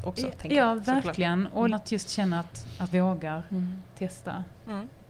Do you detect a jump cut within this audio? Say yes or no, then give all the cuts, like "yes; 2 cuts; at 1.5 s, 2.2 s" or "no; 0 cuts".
yes; 2 cuts; at 1.7 s, 2.9 s